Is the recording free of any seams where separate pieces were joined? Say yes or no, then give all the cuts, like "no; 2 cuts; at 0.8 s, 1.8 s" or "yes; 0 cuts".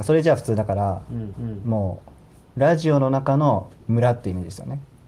no; 1 cut; at 1.3 s